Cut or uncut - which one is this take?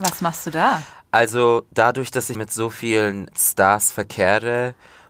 cut